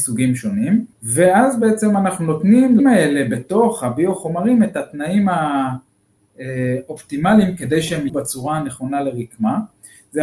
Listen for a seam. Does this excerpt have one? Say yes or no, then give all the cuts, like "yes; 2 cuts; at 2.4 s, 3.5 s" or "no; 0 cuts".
yes; 3 cuts; at 0.9 s, 2.8 s, 8.1 s